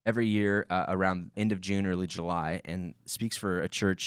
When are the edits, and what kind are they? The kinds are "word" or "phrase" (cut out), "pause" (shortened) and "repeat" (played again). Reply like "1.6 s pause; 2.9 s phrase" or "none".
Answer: 1.3 s word